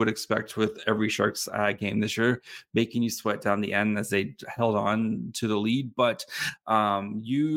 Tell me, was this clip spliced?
no; 0 cuts

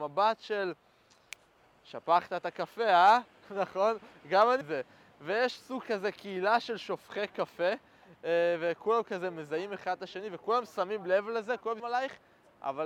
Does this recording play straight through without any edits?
no; 3 cuts; at 4.6 s, 5.8 s, 11.8 s

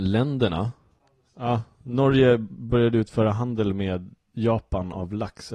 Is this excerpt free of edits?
yes; 0 cuts

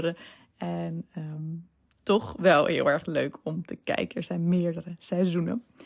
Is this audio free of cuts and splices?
yes; 0 cuts

